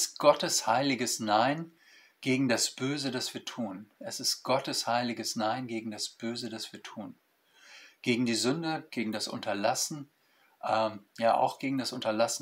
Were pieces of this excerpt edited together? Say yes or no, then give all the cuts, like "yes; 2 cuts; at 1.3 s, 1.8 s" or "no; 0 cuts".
no; 0 cuts